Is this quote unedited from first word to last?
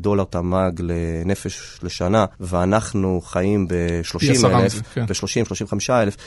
no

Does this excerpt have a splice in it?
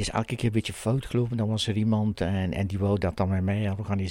no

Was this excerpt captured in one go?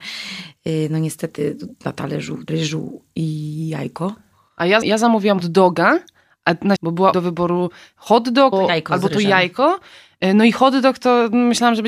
no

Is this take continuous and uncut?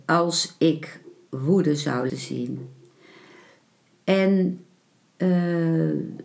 no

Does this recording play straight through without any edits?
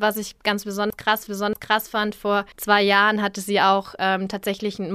no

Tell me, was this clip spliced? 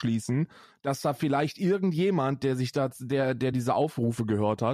no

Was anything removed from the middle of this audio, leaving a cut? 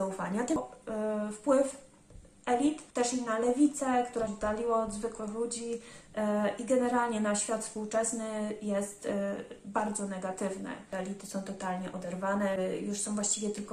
yes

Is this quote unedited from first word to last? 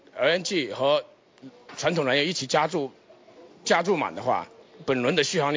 yes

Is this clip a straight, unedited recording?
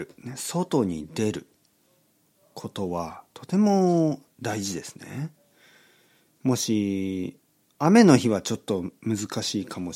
yes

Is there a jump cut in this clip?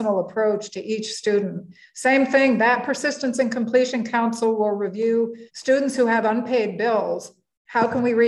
yes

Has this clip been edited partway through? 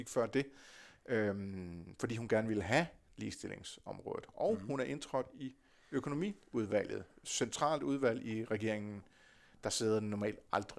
no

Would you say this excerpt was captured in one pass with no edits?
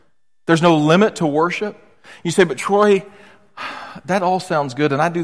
yes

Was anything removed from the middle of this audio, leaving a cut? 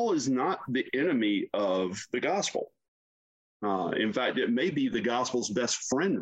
no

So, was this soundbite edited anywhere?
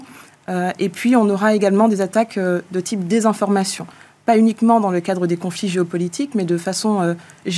no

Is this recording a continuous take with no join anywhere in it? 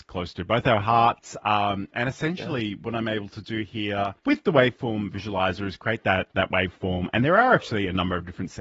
no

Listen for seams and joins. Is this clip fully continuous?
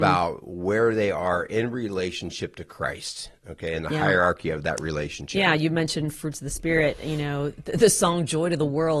yes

